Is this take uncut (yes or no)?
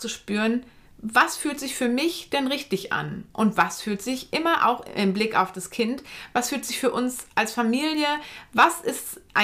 yes